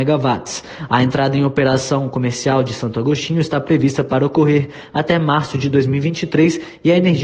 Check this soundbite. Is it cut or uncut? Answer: uncut